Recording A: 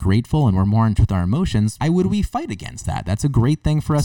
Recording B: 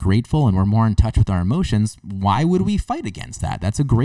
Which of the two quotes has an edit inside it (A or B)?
A